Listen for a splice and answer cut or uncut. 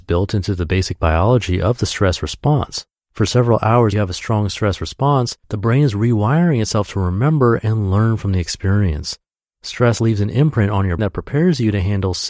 cut